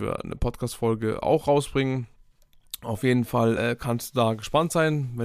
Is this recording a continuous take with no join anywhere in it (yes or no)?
yes